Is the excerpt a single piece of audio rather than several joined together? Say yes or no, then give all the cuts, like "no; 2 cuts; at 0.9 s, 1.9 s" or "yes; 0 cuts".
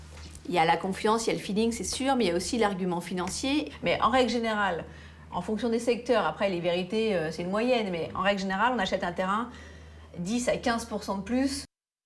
yes; 0 cuts